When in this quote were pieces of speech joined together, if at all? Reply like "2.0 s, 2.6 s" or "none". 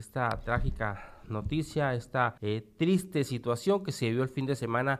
2.4 s